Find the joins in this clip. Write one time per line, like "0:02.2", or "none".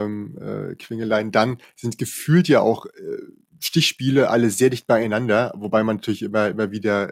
none